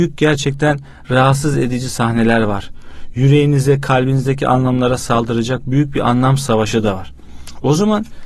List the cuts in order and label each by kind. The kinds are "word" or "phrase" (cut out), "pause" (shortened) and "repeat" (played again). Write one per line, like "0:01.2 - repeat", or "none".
none